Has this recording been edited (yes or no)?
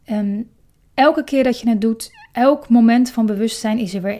no